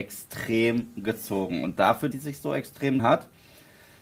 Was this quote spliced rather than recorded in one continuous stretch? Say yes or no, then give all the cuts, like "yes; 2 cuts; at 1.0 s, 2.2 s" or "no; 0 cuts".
yes; 2 cuts; at 2.1 s, 3.0 s